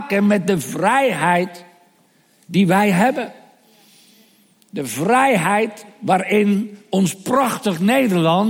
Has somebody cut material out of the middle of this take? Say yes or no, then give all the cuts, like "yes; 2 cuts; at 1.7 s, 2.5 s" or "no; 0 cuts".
no; 0 cuts